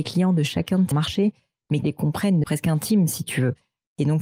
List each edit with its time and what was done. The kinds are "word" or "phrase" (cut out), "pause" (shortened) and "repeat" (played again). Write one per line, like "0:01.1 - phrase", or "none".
0:00.9 - word
0:01.8 - word
0:02.4 - word